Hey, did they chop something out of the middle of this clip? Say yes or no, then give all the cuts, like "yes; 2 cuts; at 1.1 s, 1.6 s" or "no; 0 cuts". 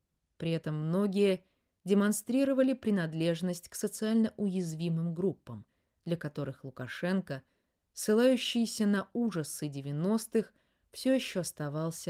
no; 0 cuts